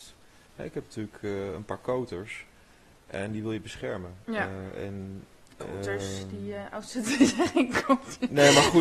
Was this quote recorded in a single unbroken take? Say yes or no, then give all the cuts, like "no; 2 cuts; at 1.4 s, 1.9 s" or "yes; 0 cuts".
yes; 0 cuts